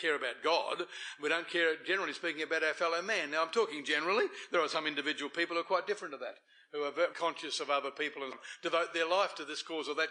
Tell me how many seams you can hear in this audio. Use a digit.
2